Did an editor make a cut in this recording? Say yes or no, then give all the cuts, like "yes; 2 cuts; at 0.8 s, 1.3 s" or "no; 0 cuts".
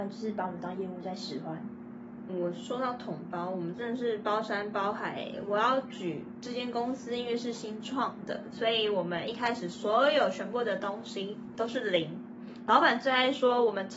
yes; 1 cut; at 2.3 s